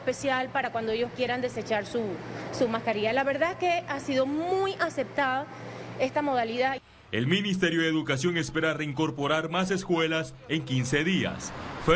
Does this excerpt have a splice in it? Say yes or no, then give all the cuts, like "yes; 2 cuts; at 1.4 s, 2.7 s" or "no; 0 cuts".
no; 0 cuts